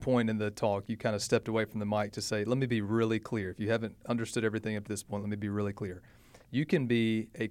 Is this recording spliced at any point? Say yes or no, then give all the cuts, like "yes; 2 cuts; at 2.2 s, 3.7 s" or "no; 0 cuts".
no; 0 cuts